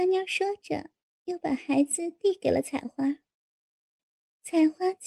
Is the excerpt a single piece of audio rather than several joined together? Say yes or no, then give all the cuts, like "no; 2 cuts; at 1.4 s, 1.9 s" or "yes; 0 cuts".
yes; 0 cuts